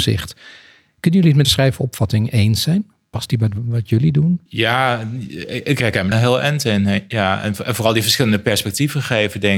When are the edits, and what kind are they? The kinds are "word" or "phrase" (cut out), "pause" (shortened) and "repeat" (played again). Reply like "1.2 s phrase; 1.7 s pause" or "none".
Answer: 1.4 s word; 4.5 s pause; 6.1 s word